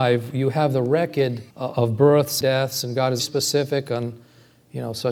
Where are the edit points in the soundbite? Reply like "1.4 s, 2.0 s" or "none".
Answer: 1.5 s, 2.4 s, 3.2 s